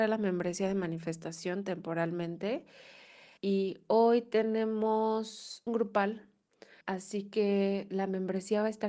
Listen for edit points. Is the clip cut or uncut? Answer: cut